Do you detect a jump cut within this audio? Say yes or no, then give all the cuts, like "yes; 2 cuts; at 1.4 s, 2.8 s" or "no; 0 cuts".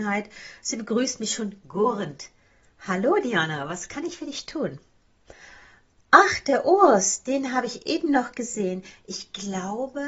no; 0 cuts